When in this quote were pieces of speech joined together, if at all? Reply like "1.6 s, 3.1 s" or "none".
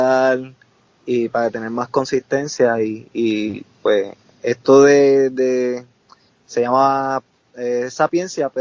none